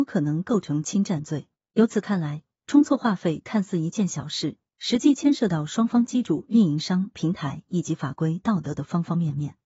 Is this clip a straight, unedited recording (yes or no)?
yes